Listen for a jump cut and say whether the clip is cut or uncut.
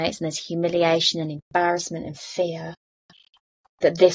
uncut